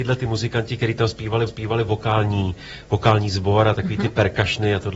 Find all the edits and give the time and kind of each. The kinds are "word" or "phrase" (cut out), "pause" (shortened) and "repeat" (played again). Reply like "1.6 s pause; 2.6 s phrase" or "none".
1.5 s repeat